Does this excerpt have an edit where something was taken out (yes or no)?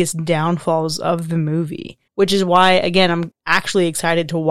yes